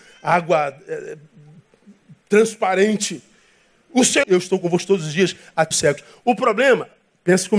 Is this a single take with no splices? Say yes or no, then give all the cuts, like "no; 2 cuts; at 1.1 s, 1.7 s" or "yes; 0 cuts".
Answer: no; 2 cuts; at 4.2 s, 5.7 s